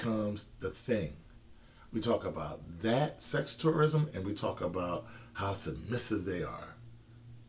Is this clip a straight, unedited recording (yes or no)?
yes